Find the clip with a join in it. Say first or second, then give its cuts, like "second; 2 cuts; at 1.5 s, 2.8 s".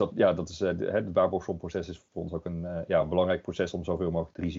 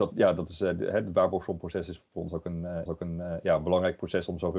second; 1 cut; at 2.9 s